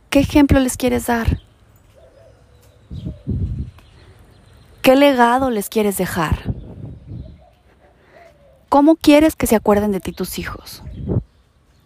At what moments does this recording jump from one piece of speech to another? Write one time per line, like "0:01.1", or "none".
none